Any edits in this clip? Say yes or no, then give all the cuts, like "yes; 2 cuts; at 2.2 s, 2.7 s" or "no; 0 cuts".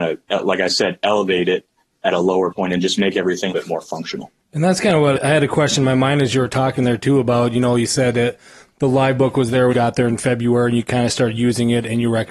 yes; 4 cuts; at 2.5 s, 3.5 s, 5.2 s, 9.7 s